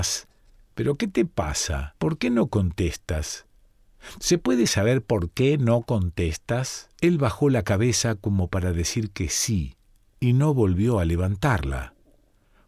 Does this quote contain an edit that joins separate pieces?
yes; 3 cuts; at 2.0 s, 6.9 s, 10.0 s

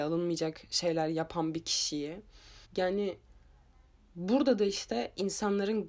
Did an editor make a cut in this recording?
yes; 1 cut; at 2.6 s

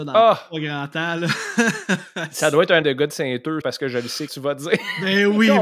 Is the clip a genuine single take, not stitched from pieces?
no; 3 cuts; at 2.8 s, 3.6 s, 4.3 s

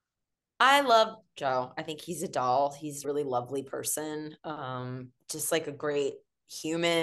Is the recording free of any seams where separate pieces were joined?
no; 1 cut; at 3.0 s

